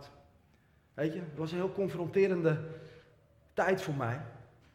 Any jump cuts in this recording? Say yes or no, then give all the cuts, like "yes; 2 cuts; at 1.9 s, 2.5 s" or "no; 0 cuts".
no; 0 cuts